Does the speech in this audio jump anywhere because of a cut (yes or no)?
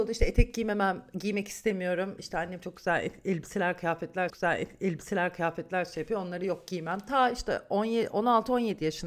yes